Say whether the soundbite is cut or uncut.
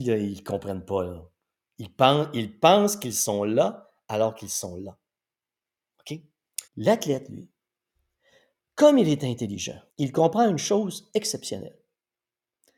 cut